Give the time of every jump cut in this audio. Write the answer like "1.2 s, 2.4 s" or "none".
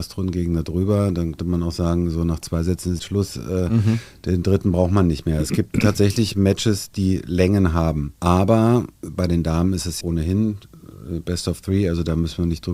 1.4 s, 3.0 s, 8.9 s, 10.0 s